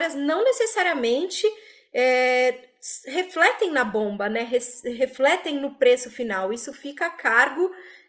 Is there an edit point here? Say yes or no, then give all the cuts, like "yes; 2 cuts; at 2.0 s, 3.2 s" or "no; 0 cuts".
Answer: no; 0 cuts